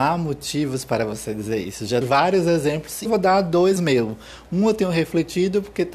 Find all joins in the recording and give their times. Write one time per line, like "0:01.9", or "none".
0:02.0
0:03.1
0:03.8